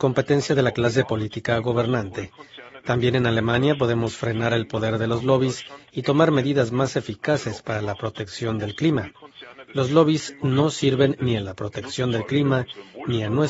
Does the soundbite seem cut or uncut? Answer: uncut